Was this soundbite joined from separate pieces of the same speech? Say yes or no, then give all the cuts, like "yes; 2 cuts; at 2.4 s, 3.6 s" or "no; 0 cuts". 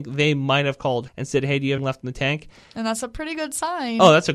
yes; 2 cuts; at 1.1 s, 1.8 s